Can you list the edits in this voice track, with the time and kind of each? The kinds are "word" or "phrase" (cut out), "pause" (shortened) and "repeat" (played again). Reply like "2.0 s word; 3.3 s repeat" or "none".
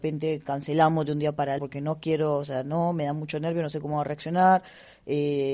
1.6 s word